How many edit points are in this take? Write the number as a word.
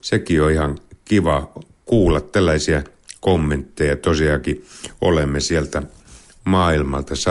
zero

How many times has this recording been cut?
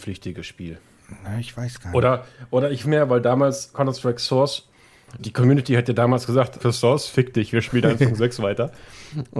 four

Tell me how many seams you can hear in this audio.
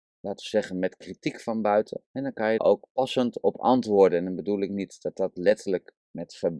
two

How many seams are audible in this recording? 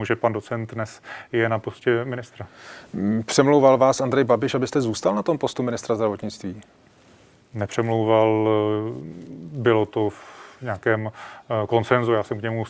zero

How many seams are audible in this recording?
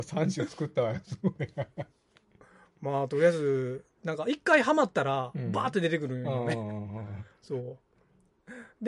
zero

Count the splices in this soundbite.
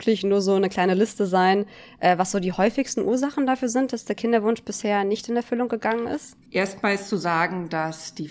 one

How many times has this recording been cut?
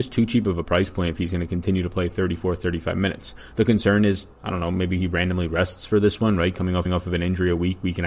one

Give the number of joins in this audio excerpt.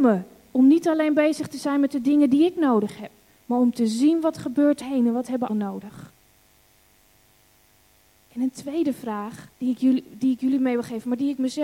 three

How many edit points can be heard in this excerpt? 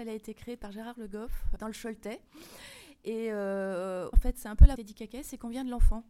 three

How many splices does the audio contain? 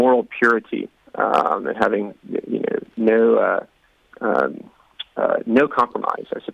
one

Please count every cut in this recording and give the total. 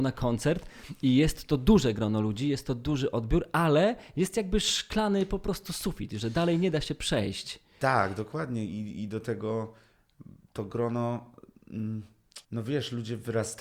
one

